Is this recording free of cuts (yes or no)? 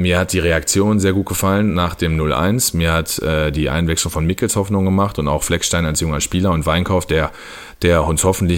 yes